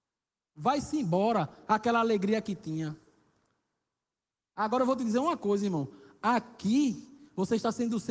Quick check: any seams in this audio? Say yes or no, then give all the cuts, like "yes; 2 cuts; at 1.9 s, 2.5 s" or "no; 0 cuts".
no; 0 cuts